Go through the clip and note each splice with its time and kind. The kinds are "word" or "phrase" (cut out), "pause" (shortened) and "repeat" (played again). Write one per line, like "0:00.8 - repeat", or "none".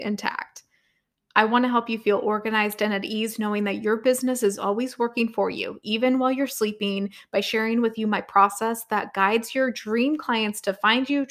none